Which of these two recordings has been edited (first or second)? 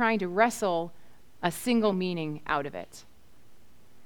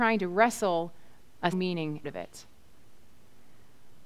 second